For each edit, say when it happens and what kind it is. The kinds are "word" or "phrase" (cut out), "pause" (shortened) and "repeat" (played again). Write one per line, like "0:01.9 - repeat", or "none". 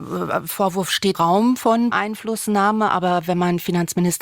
0:01.1 - word
0:01.9 - word